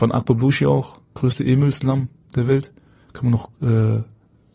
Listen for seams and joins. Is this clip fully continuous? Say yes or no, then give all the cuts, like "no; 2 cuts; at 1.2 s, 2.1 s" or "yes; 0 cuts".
yes; 0 cuts